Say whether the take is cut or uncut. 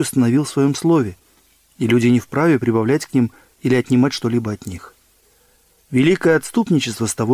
uncut